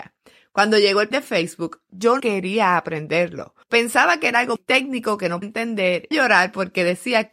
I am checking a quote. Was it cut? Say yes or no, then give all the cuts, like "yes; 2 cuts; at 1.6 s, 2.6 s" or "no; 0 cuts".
yes; 6 cuts; at 1.1 s, 2.2 s, 3.6 s, 4.6 s, 5.4 s, 6.1 s